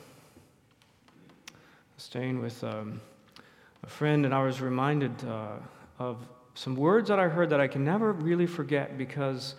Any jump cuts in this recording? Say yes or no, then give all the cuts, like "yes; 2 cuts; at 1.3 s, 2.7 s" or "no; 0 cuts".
no; 0 cuts